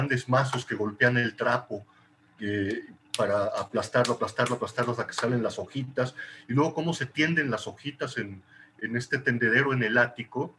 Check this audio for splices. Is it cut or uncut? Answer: uncut